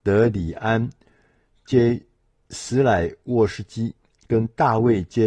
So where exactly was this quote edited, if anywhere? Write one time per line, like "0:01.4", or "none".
none